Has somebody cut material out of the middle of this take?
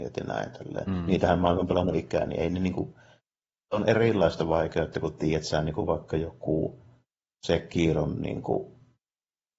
no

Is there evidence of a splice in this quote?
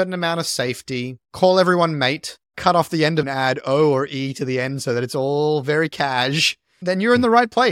yes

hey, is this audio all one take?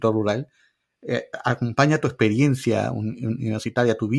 yes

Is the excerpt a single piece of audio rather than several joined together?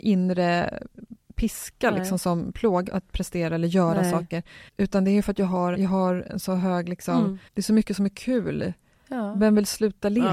no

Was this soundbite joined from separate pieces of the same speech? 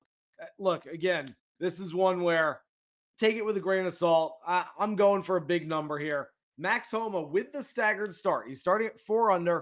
no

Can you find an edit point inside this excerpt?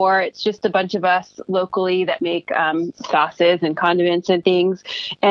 no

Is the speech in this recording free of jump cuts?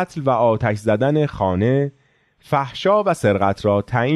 yes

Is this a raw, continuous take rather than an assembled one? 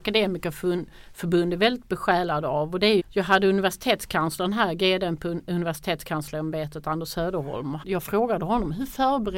no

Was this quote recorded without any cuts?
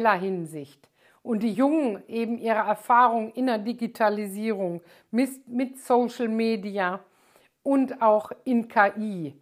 yes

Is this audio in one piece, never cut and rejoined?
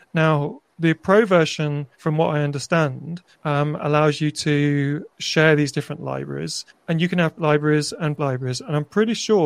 no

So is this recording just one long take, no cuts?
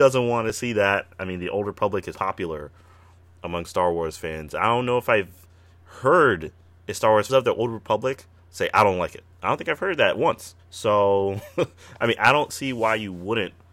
no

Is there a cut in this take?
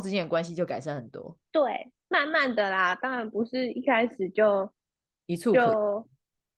yes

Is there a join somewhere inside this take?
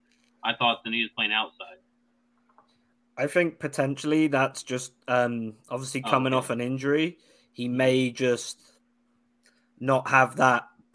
no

